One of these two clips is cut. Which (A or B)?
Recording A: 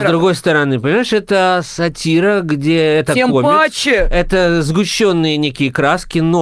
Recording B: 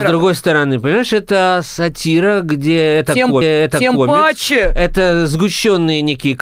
B